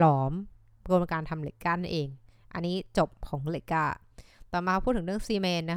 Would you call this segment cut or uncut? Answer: uncut